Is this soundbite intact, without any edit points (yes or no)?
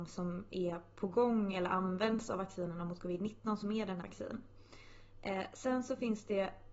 no